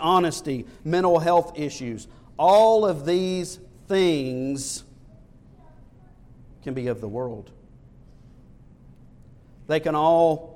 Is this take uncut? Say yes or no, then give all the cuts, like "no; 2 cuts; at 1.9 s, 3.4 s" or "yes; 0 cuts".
yes; 0 cuts